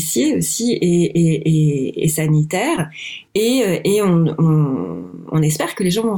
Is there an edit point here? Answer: yes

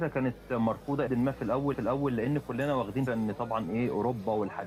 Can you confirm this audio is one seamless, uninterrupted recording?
no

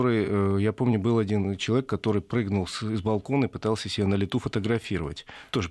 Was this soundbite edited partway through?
no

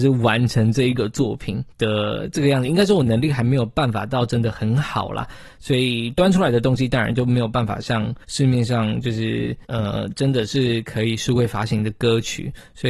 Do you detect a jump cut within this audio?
yes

